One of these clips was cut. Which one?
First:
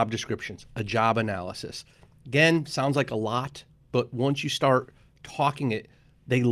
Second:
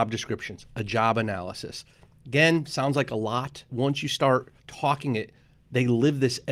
second; 2 cuts; at 3.7 s, 4.6 s

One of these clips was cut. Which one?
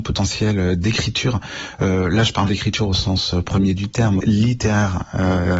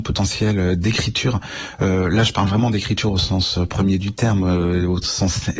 first; 2 cuts; at 2.5 s, 4.2 s

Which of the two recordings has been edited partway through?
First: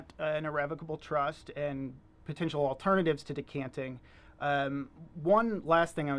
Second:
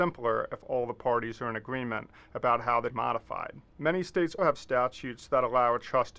second; 2 cuts; at 2.9 s, 4.4 s

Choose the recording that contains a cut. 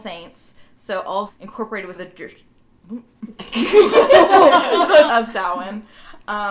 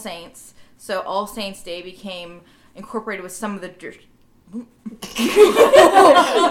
first; 3 cuts; at 1.3 s, 1.9 s, 5.1 s

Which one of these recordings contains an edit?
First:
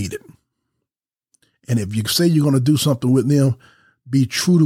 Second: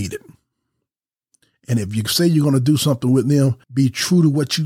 second; 1 cut; at 3.6 s

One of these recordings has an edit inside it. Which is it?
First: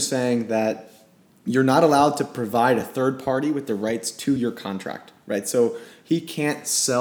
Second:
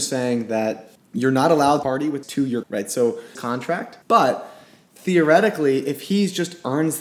second; 6 cuts; at 1.0 s, 1.8 s, 2.2 s, 2.6 s, 3.3 s, 4.0 s

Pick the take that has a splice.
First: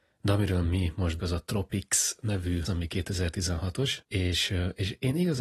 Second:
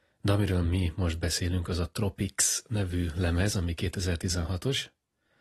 first; 3 cuts; at 1.2 s, 2.7 s, 4.0 s

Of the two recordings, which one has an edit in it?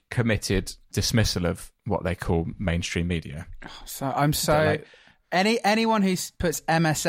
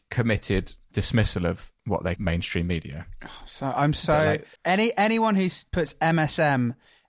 second; 2 cuts; at 2.2 s, 4.6 s

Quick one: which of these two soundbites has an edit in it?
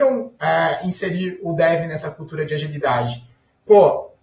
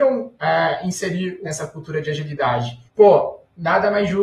second; 2 cuts; at 1.4 s, 2.9 s

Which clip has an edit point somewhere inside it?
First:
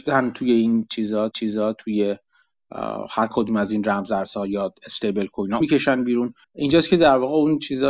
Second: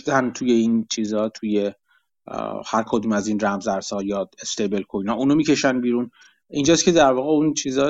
first; 3 cuts; at 1.3 s, 5.6 s, 6.4 s

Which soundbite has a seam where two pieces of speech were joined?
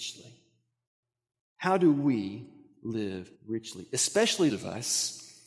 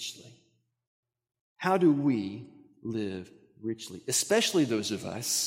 first; 2 cuts; at 3.3 s, 4.5 s

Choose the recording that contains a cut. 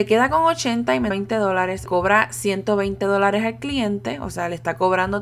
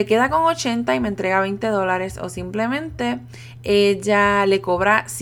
first; 2 cuts; at 1.1 s, 1.9 s

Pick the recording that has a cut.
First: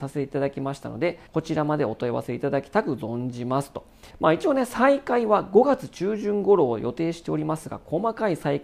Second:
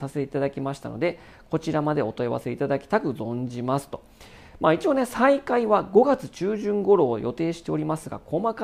first; 2 cuts; at 1.3 s, 4.1 s

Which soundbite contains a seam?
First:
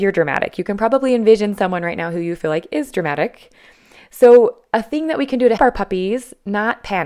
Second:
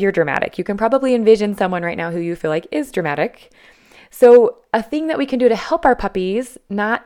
first; 1 cut; at 5.6 s

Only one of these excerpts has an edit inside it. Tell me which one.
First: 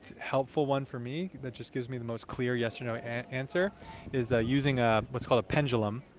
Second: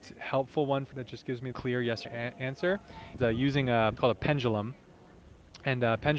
second; 5 cuts; at 0.9 s, 1.5 s, 2.0 s, 3.2 s, 4.0 s

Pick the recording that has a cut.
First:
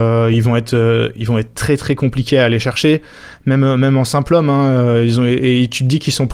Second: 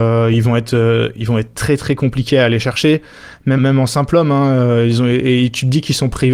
second; 1 cut; at 3.6 s

